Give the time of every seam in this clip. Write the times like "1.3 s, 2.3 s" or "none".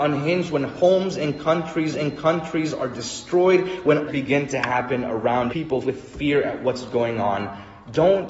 1.9 s, 4.1 s, 5.5 s, 5.8 s